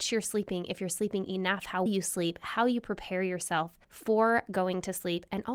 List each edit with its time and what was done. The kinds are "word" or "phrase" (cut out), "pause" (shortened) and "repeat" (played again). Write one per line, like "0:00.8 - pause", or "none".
0:01.9 - word
0:03.8 - pause